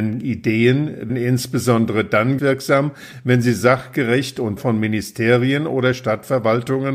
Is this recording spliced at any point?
yes; 3 cuts; at 1.1 s, 2.4 s, 4.6 s

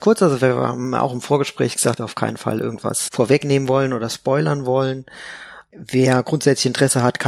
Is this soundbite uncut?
no; 2 cuts; at 2.0 s, 3.1 s

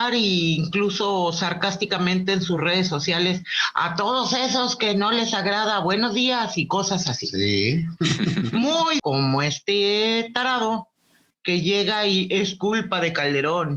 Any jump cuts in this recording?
yes; 1 cut; at 9.0 s

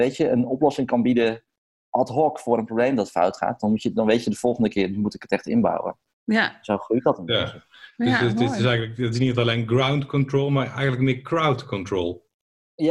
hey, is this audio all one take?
yes; 0 cuts

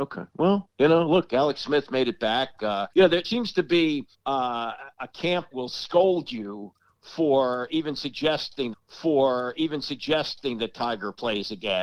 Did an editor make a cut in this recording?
yes; 5 cuts; at 2.9 s, 3.2 s, 4.1 s, 5.5 s, 8.7 s

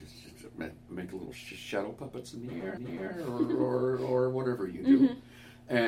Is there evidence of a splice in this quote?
yes; 1 cut; at 2.8 s

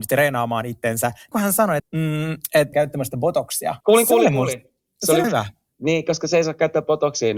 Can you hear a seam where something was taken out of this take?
yes; 5 cuts; at 1.3 s, 1.8 s, 2.7 s, 3.8 s, 5.2 s

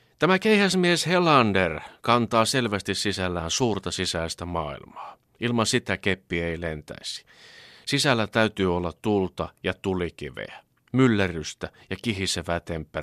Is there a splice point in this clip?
no; 0 cuts

